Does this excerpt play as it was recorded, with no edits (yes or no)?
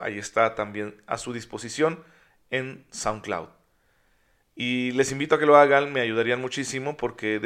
yes